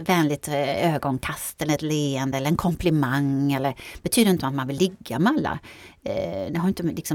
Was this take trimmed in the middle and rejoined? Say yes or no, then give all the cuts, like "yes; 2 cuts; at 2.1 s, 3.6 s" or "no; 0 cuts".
no; 0 cuts